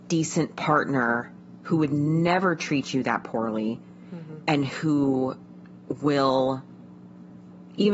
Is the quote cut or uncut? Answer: uncut